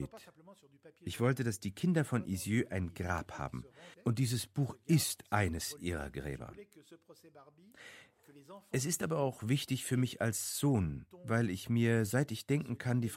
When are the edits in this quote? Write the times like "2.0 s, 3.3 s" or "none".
3.9 s

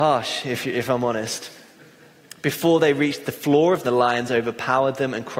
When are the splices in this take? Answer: 3.8 s

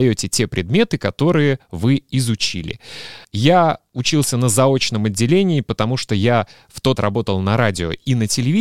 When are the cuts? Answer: 3.2 s, 7.0 s

